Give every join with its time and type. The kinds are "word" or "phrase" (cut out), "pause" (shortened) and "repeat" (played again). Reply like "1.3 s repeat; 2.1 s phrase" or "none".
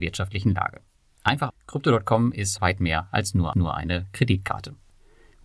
1.5 s word; 2.6 s word; 3.5 s repeat

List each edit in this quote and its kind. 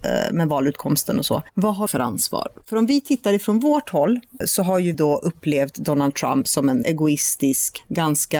1.9 s word; 4.9 s word; 6.8 s word

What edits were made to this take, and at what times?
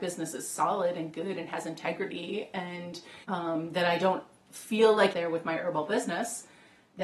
3.2 s pause; 5.1 s phrase

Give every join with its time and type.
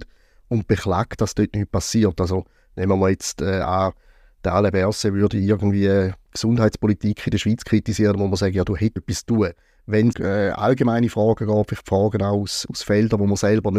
9.0 s phrase; 10.1 s word

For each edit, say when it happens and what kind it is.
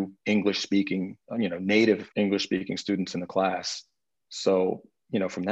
1.3 s pause; 2.1 s pause; 4.1 s pause

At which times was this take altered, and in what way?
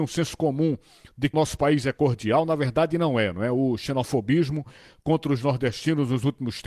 1.3 s word

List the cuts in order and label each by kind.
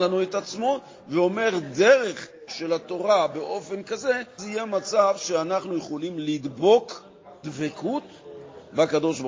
2.5 s word; 4.4 s word; 7.4 s word

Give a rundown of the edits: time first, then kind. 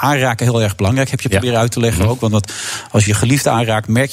3.1 s word

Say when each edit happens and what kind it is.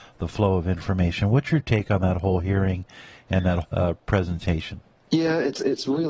3.6 s word

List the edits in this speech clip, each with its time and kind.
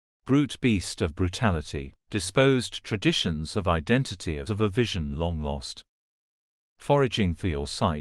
2.0 s pause; 4.5 s phrase

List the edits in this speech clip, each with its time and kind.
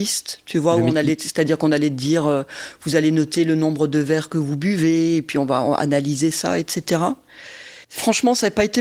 7.8 s pause

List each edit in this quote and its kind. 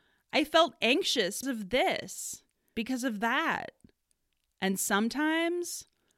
1.4 s word; 2.7 s word

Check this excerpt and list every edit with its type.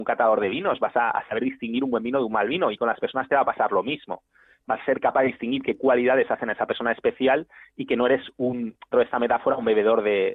8.9 s word

